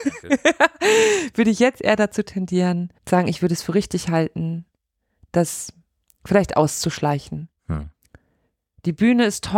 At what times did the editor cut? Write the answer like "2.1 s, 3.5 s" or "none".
3.0 s